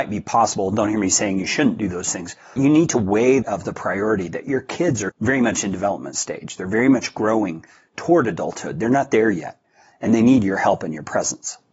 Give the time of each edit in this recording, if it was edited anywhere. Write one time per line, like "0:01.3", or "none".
0:02.6
0:03.4
0:05.1